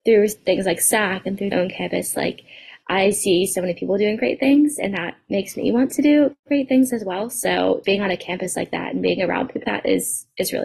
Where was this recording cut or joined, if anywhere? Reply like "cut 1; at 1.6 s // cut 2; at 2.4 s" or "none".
cut 1; at 1.5 s // cut 2; at 7.8 s // cut 3; at 9.6 s